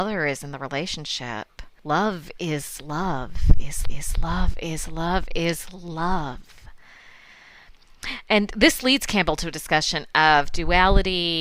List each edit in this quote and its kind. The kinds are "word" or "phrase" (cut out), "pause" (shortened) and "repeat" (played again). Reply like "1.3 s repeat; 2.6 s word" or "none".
1.8 s pause; 3.8 s repeat